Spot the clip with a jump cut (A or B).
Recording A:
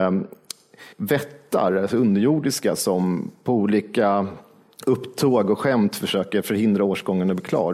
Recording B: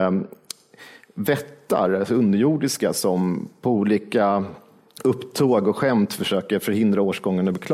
A